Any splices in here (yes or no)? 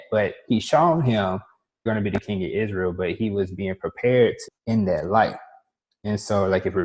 yes